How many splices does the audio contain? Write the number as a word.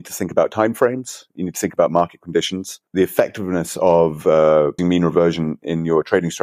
two